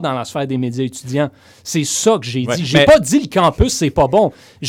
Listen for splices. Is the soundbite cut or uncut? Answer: uncut